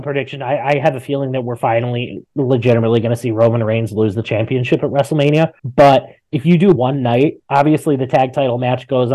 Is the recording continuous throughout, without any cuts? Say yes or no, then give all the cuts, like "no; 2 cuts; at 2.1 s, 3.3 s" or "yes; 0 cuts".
no; 3 cuts; at 5.6 s, 6.7 s, 7.4 s